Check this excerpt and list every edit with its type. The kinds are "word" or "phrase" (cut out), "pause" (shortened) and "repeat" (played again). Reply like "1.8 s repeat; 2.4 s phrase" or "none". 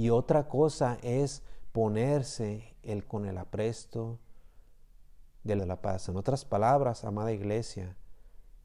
3.0 s word; 5.6 s word